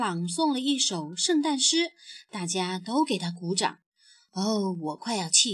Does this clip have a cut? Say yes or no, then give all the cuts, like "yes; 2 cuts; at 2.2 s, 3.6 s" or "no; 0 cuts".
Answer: no; 0 cuts